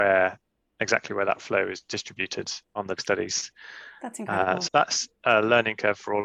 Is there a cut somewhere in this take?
yes; 2 cuts; at 3.0 s, 4.7 s

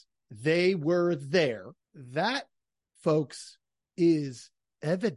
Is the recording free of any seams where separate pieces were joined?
no; 1 cut; at 1.8 s

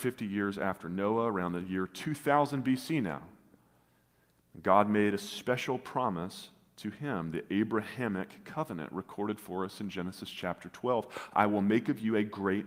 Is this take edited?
no; 0 cuts

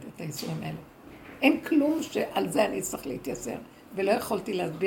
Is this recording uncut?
yes; 0 cuts

